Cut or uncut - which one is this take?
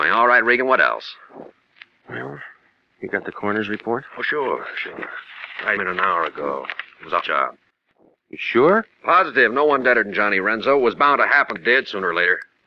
cut